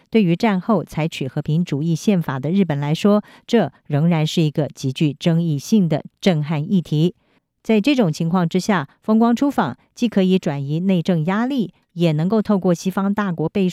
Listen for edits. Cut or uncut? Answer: uncut